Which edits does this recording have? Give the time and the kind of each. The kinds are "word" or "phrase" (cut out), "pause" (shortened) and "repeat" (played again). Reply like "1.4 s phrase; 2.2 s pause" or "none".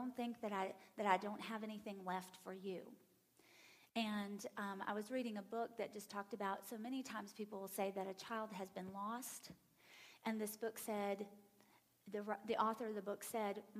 none